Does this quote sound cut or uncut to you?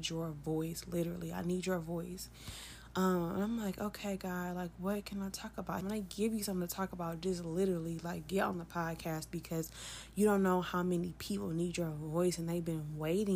cut